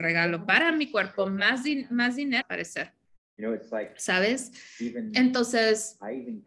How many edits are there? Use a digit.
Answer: 1